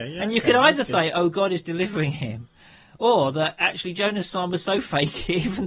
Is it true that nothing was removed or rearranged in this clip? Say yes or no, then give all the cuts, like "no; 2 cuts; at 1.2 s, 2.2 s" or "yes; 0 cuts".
yes; 0 cuts